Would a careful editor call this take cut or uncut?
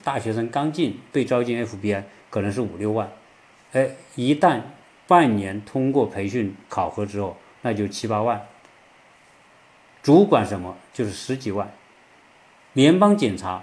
uncut